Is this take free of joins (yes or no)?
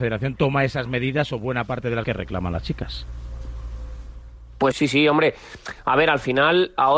no